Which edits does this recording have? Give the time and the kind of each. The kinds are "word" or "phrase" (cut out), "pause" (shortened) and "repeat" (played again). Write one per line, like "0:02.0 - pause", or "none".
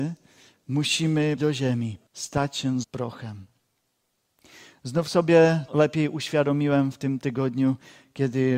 0:01.4 - word
0:02.1 - pause
0:02.8 - word
0:05.7 - word